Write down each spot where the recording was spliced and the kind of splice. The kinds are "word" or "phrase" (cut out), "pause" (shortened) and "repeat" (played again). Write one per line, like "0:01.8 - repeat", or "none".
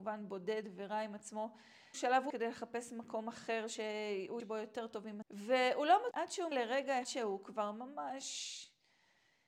0:01.9 - word
0:02.3 - word
0:04.4 - word
0:05.2 - word
0:06.1 - word
0:06.5 - word
0:07.0 - word